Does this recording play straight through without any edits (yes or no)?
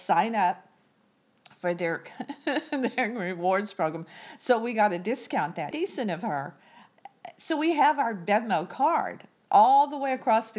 no